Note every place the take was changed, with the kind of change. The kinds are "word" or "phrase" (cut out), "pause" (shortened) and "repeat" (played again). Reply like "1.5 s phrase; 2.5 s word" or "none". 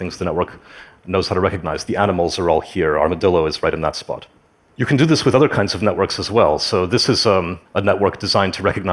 4.6 s pause; 7.7 s pause